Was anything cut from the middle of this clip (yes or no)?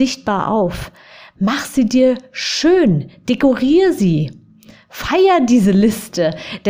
no